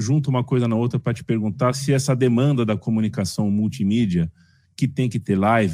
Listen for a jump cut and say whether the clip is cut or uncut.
uncut